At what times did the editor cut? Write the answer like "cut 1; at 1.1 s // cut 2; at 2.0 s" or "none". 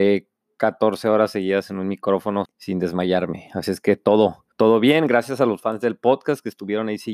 cut 1; at 2.4 s // cut 2; at 4.5 s